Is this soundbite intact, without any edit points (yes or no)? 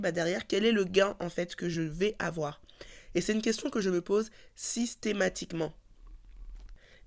yes